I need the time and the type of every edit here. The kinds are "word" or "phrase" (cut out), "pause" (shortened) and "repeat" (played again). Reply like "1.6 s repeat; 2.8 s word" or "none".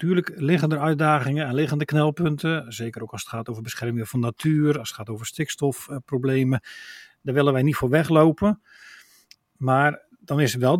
none